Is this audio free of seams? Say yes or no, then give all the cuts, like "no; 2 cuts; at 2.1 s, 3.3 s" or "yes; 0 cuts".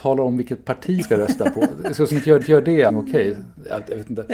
no; 4 cuts; at 1.0 s, 2.1 s, 2.4 s, 2.9 s